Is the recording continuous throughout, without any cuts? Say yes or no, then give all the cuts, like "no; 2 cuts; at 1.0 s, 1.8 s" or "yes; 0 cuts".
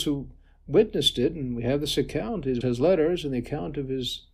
no; 1 cut; at 2.6 s